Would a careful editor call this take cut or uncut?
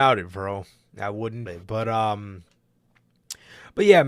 cut